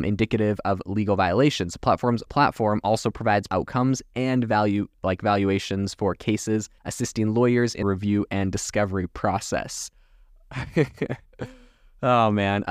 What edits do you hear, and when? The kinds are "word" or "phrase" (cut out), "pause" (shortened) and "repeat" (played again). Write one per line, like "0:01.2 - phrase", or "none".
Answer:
0:02.3 - phrase
0:03.5 - phrase
0:06.8 - pause
0:07.8 - word